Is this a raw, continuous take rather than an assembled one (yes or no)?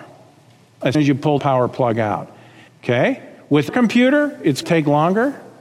no